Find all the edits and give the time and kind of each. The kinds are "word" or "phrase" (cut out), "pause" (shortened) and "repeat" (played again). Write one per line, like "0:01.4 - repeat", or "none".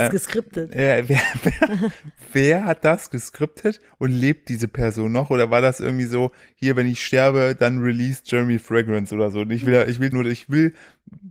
0:10.1 - word